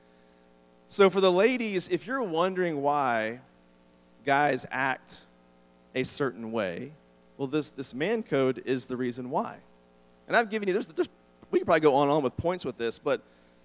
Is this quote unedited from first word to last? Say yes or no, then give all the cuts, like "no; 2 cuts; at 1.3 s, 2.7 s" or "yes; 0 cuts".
yes; 0 cuts